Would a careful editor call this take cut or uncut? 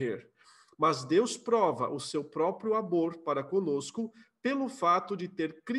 uncut